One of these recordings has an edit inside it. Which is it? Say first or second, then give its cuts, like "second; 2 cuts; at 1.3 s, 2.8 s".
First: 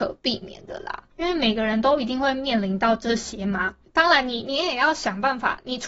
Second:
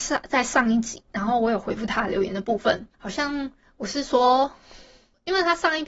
first; 1 cut; at 1.1 s